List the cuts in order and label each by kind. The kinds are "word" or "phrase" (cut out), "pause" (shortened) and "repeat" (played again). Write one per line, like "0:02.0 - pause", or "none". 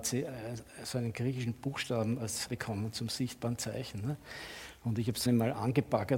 0:02.5 - word
0:05.3 - word